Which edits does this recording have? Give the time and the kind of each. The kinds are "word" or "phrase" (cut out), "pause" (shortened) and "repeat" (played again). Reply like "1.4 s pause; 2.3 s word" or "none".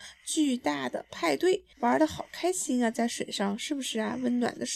1.7 s pause